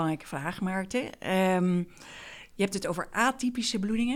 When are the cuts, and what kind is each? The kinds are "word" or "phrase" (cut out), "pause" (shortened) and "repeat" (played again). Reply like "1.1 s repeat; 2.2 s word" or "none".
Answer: none